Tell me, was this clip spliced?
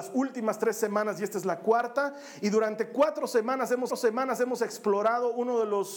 yes; 1 cut; at 3.9 s

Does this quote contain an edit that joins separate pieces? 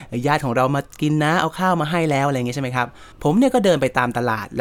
yes; 1 cut; at 3.1 s

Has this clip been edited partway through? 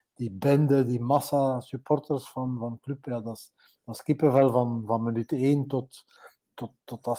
no; 0 cuts

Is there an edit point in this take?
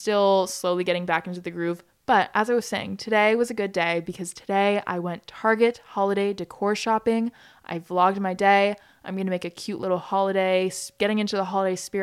no; 0 cuts

